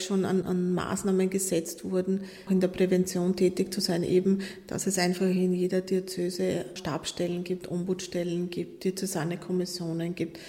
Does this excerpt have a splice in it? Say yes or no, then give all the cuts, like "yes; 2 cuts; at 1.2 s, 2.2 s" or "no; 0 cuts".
yes; 1 cut; at 2.5 s